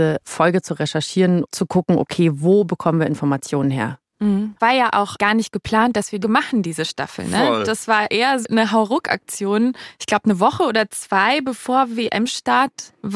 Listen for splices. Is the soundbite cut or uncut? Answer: cut